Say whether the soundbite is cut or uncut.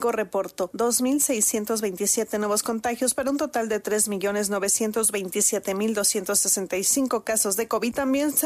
uncut